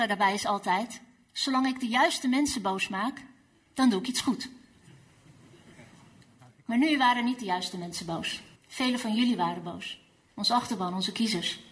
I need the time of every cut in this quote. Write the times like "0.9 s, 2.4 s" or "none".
8.5 s